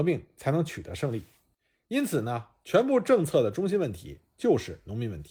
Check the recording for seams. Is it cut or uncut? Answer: uncut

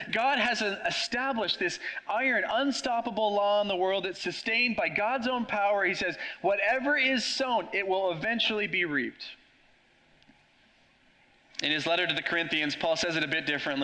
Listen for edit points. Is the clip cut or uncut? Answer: uncut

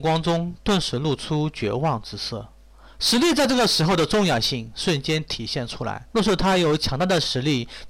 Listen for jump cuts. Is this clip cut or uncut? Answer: cut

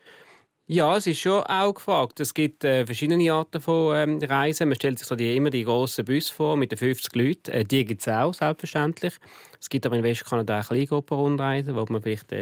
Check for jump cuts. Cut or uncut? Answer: uncut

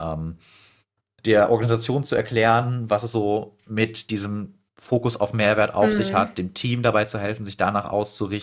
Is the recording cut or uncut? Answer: cut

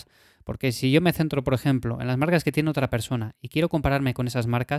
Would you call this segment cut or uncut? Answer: uncut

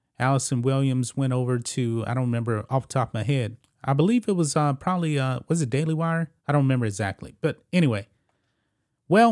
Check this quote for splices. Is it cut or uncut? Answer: cut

